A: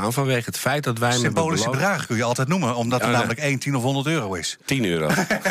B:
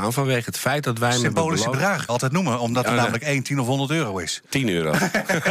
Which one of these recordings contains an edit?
B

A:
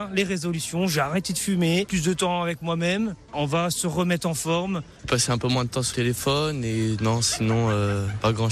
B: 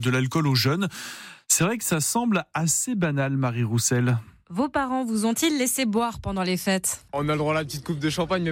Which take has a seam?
A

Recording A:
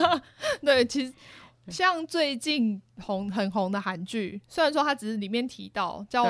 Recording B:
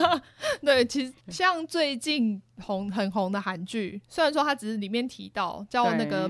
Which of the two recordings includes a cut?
B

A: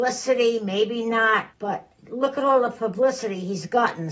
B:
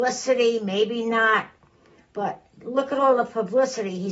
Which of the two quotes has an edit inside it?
A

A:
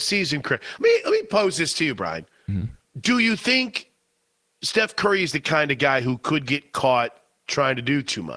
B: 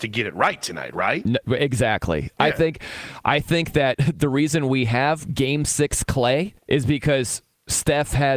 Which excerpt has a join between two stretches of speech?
B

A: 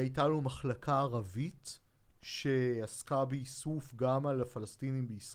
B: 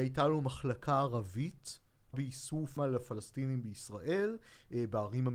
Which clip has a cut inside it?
B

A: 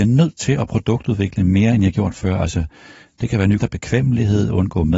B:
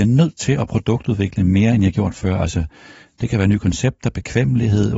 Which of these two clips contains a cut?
A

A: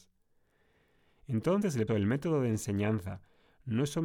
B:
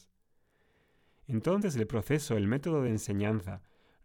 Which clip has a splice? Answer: A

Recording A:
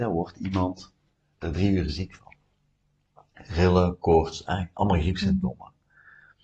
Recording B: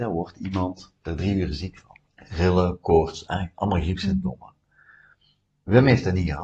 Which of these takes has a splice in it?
B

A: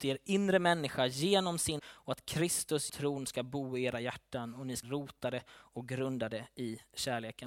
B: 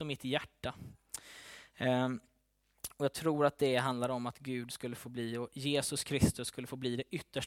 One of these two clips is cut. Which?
A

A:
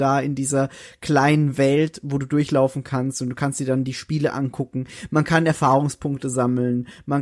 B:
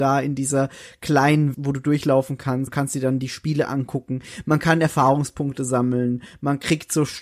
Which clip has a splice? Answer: B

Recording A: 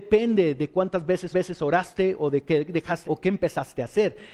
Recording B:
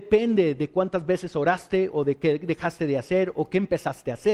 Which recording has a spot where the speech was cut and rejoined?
A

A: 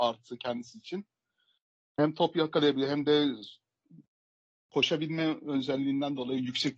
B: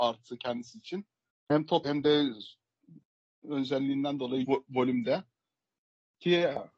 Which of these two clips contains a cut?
B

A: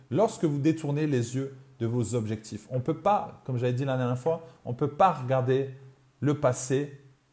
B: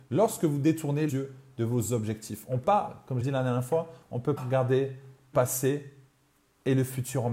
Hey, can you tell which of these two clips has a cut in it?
B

